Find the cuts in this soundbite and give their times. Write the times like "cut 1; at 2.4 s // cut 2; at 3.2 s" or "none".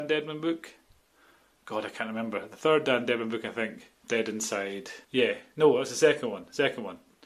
cut 1; at 4.0 s // cut 2; at 5.0 s